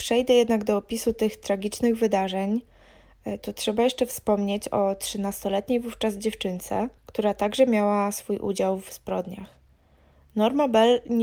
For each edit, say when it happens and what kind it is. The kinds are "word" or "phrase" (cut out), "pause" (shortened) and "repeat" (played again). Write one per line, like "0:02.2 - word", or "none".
0:07.0 - pause